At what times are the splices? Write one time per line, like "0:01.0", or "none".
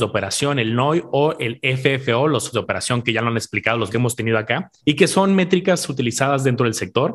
0:02.5
0:03.9
0:04.8